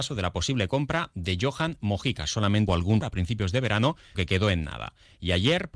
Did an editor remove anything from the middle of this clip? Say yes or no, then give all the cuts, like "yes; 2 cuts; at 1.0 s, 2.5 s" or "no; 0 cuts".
yes; 3 cuts; at 2.7 s, 3.0 s, 4.1 s